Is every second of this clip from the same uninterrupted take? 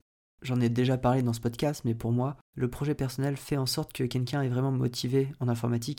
no; 1 cut; at 2.4 s

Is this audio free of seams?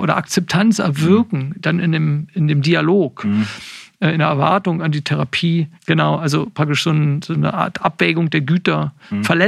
no; 1 cut; at 5.8 s

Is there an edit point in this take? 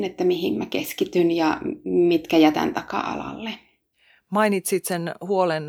no; 0 cuts

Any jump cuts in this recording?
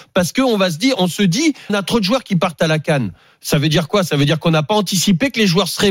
yes; 1 cut; at 1.7 s

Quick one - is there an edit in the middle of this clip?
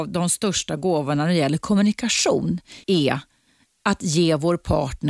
yes; 1 cut; at 2.8 s

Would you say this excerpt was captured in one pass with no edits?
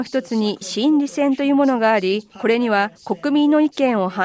no; 1 cut; at 3.0 s

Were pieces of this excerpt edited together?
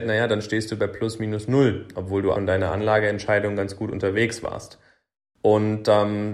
yes; 1 cut; at 2.3 s

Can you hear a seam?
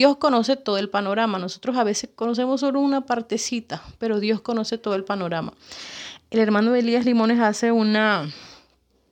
no; 0 cuts

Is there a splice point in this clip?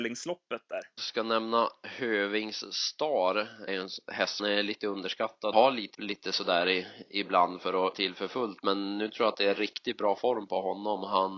yes; 6 cuts; at 1.0 s, 3.7 s, 4.4 s, 5.5 s, 5.9 s, 7.9 s

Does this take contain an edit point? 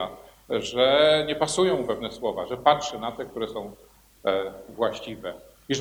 no; 0 cuts

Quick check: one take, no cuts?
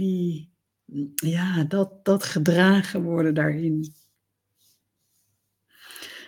yes; 0 cuts

